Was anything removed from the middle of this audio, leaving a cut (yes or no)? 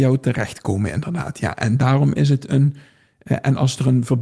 no